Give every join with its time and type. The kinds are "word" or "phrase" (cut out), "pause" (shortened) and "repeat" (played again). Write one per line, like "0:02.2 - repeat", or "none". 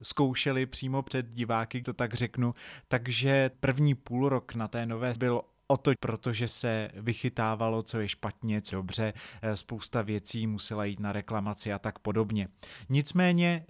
0:01.8 - word
0:03.5 - word
0:05.2 - word
0:06.0 - word
0:06.5 - word
0:08.7 - word